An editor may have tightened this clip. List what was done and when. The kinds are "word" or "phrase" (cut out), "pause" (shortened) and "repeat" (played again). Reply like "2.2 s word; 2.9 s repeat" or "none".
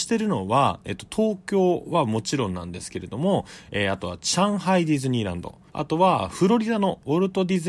5.7 s pause